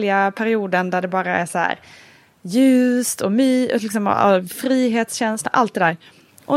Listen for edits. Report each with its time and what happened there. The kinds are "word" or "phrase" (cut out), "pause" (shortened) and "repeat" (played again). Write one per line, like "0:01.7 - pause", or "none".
none